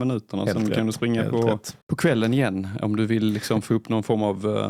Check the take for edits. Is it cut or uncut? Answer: cut